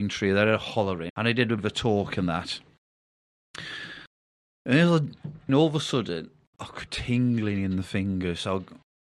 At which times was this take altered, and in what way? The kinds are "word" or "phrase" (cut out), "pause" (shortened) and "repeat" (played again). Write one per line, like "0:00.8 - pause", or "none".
0:01.1 - word
0:01.6 - word
0:05.5 - word
0:06.5 - word
0:06.9 - word